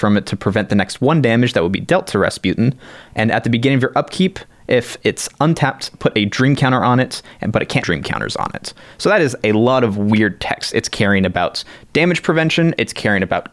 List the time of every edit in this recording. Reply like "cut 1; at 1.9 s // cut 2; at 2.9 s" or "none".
cut 1; at 7.8 s